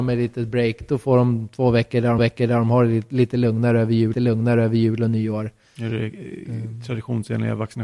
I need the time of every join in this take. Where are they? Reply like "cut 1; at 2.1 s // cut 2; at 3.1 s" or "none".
cut 1; at 2.2 s // cut 2; at 4.1 s